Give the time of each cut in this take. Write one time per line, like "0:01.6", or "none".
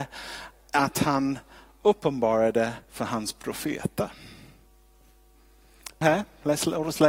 0:02.8
0:06.0